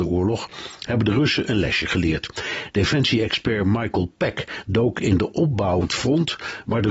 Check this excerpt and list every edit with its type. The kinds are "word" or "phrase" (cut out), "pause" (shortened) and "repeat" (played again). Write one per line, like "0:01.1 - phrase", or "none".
0:05.8 - word